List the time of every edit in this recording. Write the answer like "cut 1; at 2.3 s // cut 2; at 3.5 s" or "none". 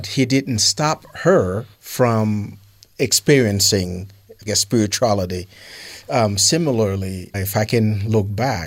cut 1; at 1.7 s // cut 2; at 4.5 s // cut 3; at 7.3 s